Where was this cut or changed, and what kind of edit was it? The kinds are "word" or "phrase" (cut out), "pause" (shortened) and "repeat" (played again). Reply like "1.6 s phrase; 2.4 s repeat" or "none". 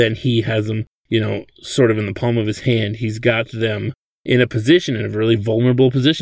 0.9 s pause; 4.0 s pause